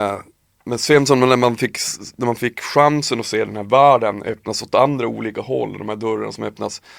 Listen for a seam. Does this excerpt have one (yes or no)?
no